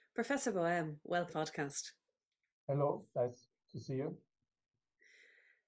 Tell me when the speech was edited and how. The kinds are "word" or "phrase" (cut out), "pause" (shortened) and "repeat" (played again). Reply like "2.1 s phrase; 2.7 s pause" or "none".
1.3 s word

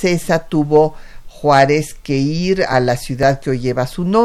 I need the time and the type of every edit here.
none

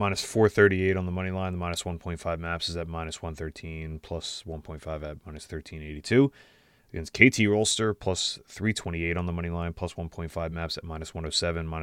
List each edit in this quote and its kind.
none

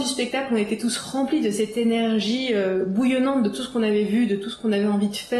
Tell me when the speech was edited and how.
none

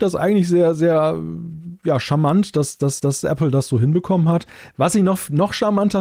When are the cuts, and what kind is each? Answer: 3.0 s repeat

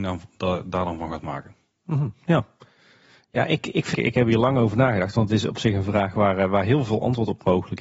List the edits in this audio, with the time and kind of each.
3.9 s phrase

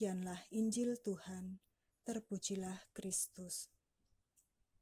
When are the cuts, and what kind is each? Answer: none

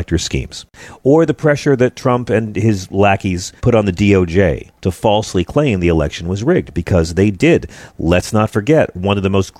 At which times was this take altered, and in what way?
3.6 s pause; 4.8 s pause

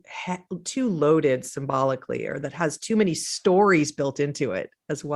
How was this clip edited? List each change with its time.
none

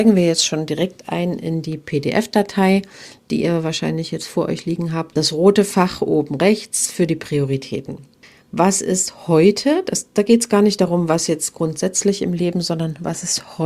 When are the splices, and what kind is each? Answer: none

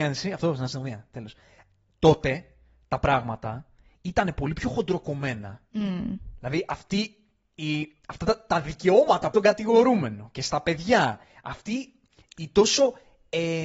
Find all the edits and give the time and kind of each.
9.3 s phrase

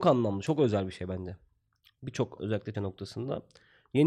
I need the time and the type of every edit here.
2.4 s word; 2.7 s word

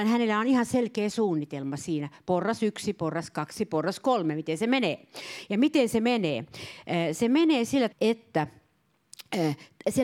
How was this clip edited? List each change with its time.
7.9 s word

